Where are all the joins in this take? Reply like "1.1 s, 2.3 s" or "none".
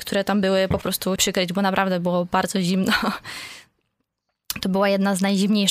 1.2 s